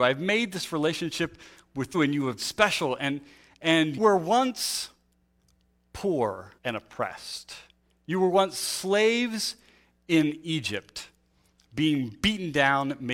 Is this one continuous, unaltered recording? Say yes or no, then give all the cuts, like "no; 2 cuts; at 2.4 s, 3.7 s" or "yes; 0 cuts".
no; 4 cuts; at 1.9 s, 2.4 s, 4.0 s, 6.6 s